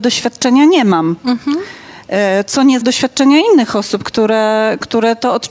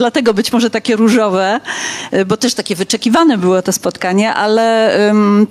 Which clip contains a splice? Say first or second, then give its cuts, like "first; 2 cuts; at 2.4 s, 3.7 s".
first; 1 cut; at 2.8 s